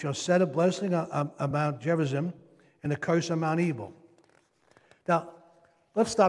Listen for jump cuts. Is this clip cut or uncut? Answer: uncut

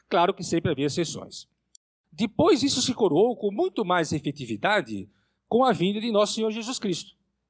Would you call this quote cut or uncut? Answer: uncut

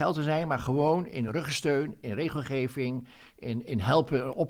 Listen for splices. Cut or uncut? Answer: uncut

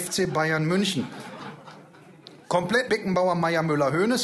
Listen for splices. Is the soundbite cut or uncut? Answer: cut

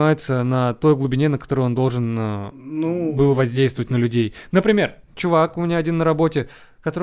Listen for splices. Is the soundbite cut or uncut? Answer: uncut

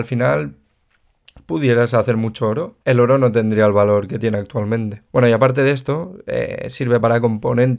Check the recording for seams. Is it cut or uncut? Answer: cut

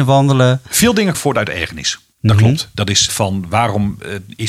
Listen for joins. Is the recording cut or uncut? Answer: cut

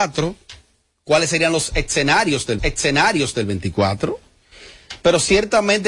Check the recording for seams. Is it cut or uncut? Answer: cut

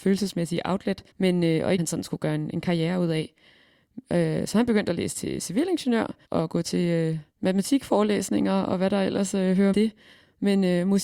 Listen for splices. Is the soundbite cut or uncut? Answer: cut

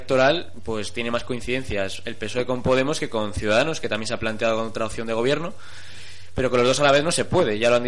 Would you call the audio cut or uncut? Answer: uncut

